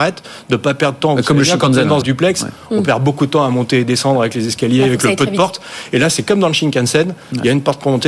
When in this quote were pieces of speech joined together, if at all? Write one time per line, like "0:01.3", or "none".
0:01.0
0:02.0